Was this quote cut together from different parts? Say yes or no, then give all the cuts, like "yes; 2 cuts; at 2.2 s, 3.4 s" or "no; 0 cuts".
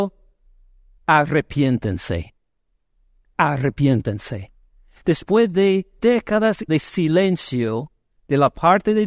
yes; 2 cuts; at 6.0 s, 6.7 s